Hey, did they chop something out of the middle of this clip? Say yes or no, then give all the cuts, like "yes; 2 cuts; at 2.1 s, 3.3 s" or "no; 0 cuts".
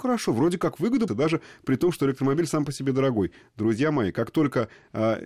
yes; 1 cut; at 1.1 s